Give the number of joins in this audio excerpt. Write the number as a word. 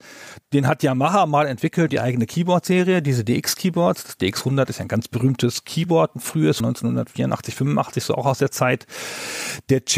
two